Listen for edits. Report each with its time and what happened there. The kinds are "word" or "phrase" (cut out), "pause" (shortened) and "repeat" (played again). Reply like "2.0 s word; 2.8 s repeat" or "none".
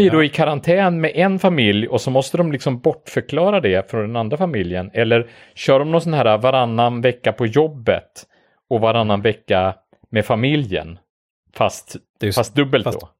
none